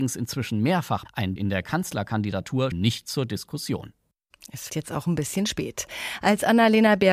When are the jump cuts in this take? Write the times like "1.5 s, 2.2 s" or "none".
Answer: 1.0 s, 1.4 s, 2.7 s, 4.7 s